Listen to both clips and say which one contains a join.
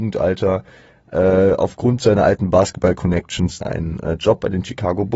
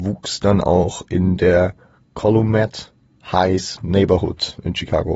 first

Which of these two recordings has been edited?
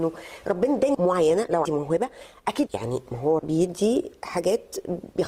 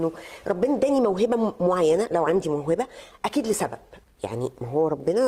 first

